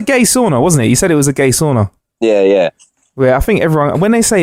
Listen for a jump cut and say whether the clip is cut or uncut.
uncut